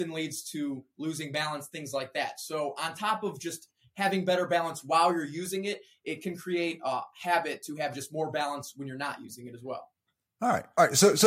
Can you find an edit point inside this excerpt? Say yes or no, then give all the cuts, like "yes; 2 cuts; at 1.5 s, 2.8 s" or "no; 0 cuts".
no; 0 cuts